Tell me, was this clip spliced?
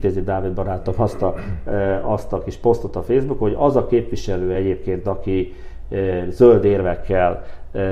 no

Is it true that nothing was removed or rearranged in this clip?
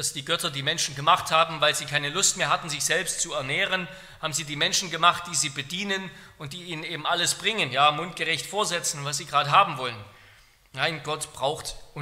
yes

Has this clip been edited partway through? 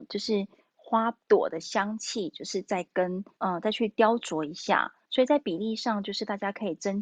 yes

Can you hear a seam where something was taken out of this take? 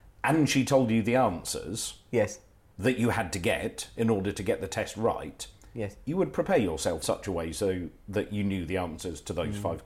yes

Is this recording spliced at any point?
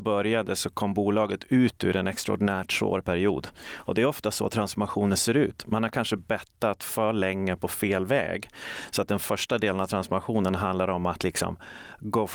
no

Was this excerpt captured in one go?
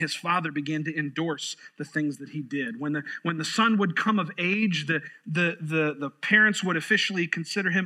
yes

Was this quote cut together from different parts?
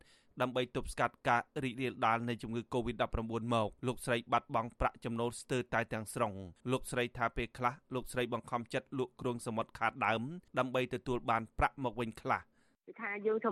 yes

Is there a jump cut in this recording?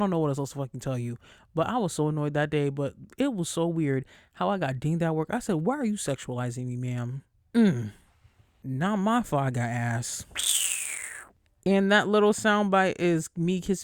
no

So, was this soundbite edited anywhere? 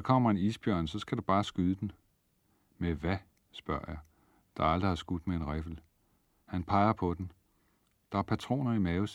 no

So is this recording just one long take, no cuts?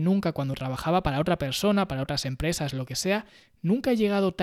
yes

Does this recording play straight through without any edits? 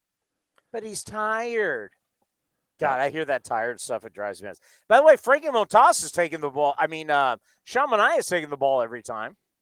yes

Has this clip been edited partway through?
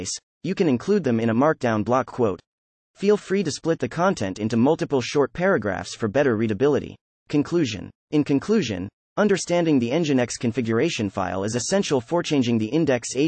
yes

